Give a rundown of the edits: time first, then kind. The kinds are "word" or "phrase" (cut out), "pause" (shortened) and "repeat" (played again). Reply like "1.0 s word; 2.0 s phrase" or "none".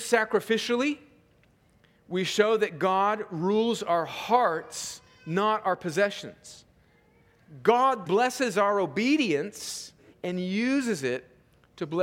8.0 s word; 10.1 s pause